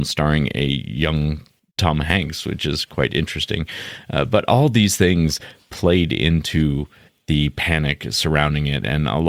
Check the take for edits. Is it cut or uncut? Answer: uncut